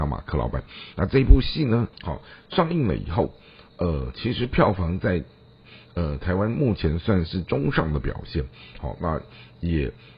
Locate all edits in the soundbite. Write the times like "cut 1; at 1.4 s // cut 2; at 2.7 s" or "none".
cut 1; at 1.9 s